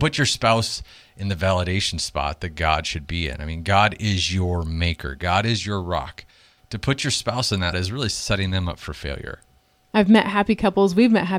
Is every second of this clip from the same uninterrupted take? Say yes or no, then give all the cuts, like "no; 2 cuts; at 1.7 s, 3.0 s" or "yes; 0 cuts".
no; 1 cut; at 7.7 s